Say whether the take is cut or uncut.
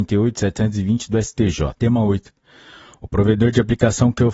cut